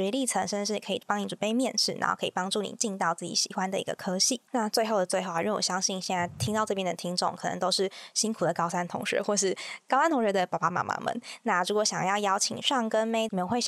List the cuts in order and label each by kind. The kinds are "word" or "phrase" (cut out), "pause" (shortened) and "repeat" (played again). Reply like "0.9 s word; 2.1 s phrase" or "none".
4.5 s pause

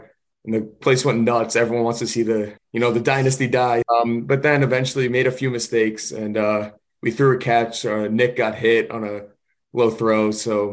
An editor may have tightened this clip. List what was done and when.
2.6 s pause; 3.8 s word; 5.1 s word

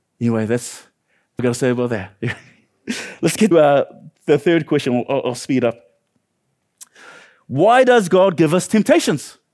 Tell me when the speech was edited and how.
1.4 s word; 3.5 s phrase

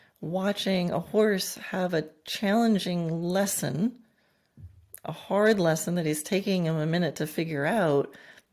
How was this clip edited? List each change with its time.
none

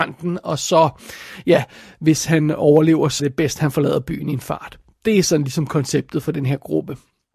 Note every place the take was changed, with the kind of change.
3.2 s word

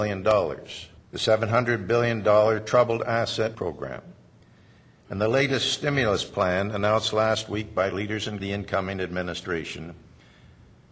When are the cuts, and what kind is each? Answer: 1.0 s pause; 3.5 s word; 8.4 s phrase

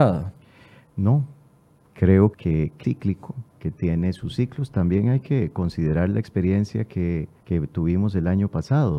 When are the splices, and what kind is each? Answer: 2.3 s word; 2.8 s word; 3.5 s pause; 7.4 s pause

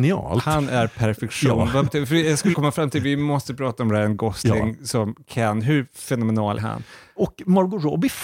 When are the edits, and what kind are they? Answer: 1.9 s word; 2.5 s word; 6.6 s word

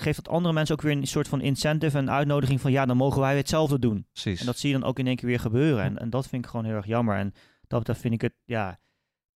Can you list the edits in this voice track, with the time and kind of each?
none

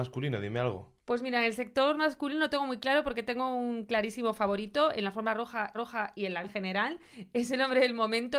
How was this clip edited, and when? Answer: 5.7 s repeat; 6.4 s word

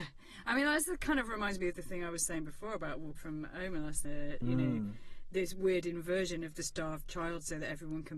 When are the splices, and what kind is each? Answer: 3.2 s word; 4.1 s word

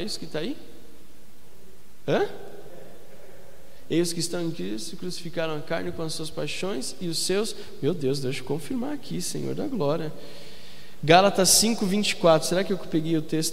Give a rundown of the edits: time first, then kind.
none

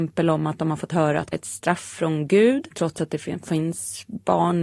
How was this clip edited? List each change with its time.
1.3 s word

